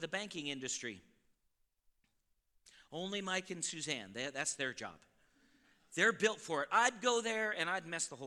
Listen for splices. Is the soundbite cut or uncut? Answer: uncut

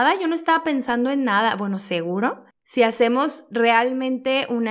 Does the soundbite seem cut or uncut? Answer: uncut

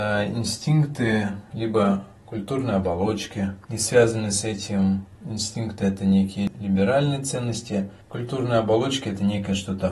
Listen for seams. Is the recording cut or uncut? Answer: cut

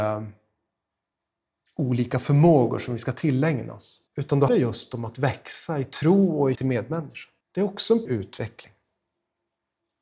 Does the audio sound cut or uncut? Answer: cut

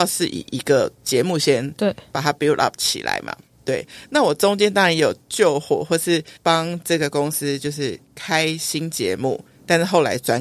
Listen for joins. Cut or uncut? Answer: cut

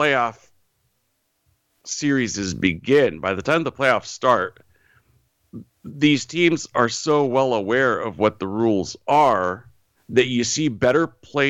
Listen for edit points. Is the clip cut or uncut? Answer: cut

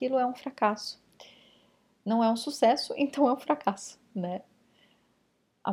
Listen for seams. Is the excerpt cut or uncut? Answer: uncut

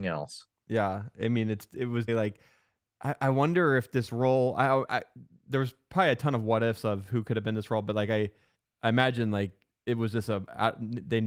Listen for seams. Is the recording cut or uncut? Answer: cut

